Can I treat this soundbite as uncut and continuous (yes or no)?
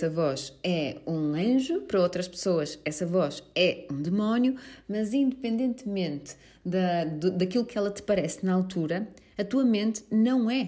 yes